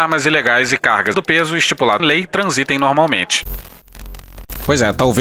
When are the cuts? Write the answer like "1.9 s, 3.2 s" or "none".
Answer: 1.1 s, 2.0 s